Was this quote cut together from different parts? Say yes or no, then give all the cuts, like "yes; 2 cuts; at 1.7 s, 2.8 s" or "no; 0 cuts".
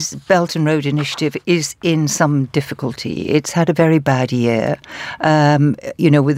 no; 0 cuts